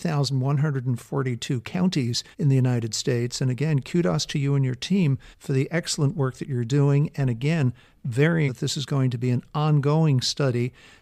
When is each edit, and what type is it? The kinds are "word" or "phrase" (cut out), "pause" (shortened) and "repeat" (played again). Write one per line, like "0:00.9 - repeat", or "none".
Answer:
0:02.3 - pause
0:05.3 - pause
0:08.5 - word

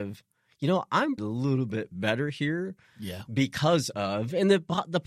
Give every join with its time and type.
0:01.2 - phrase

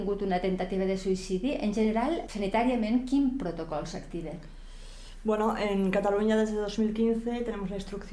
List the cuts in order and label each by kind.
0:02.3 - word

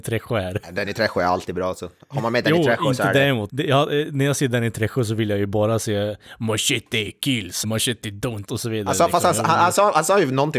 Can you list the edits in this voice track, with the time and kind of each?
0:03.5 - word
0:07.6 - word
0:08.5 - word

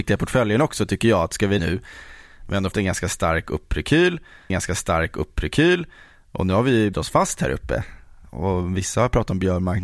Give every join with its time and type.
0:01.6 - phrase
0:02.7 - word
0:04.5 - repeat
0:06.9 - word

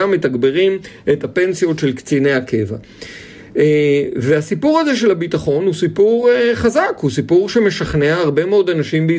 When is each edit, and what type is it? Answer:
none

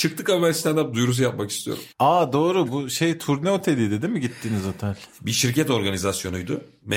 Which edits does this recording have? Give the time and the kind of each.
0:01.9 - pause

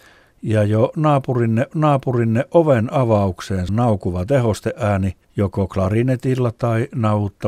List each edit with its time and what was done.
0:01.7 - repeat
0:03.7 - word
0:05.2 - pause

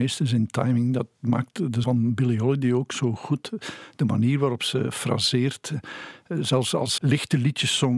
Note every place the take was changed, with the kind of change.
0:01.8 - word
0:07.0 - word

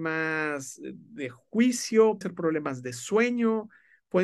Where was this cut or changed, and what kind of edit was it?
0:02.2 - word

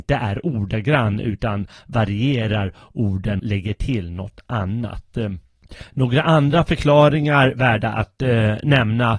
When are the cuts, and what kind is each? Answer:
0:03.4 - word

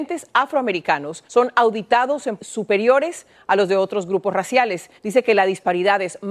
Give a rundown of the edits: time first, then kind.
0:01.3 - pause
0:02.4 - word
0:05.0 - pause

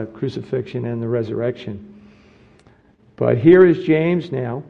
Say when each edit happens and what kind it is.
none

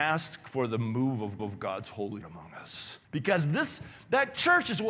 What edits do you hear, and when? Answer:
0:01.4 - repeat
0:02.2 - word
0:03.0 - pause

